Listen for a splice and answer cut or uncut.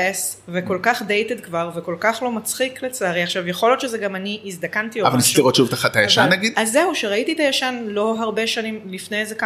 uncut